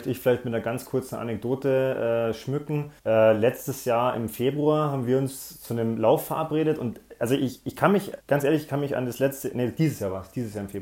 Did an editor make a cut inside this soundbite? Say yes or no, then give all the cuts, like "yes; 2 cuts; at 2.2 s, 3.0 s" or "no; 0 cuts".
yes; 2 cuts; at 3.0 s, 8.2 s